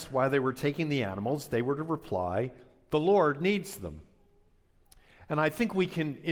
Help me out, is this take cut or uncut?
uncut